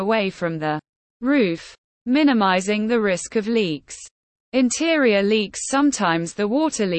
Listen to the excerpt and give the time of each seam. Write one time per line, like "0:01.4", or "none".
none